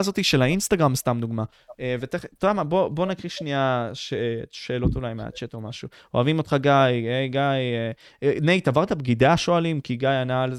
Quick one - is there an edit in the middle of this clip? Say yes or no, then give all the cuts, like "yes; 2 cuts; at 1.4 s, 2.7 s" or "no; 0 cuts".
no; 0 cuts